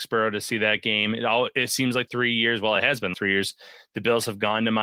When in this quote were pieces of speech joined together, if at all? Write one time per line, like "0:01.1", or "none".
0:02.1
0:03.1